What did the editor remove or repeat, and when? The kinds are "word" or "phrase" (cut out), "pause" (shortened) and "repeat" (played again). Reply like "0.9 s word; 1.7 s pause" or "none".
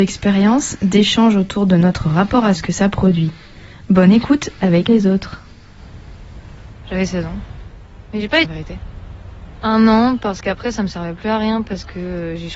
2.5 s phrase; 4.9 s phrase; 8.4 s phrase